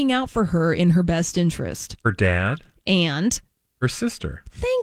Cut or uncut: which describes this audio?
uncut